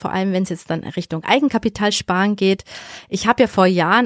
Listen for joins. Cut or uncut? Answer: uncut